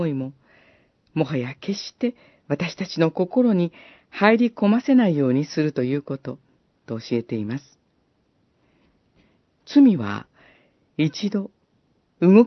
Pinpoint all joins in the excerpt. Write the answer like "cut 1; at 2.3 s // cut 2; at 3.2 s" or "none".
none